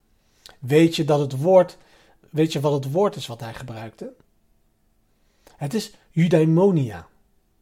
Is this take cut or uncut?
uncut